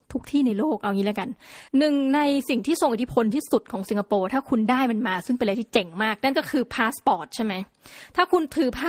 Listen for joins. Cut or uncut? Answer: cut